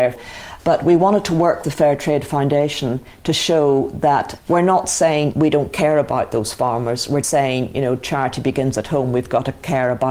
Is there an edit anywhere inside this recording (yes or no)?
yes